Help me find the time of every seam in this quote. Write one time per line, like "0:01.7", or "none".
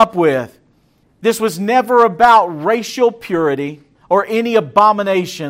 0:01.0
0:03.9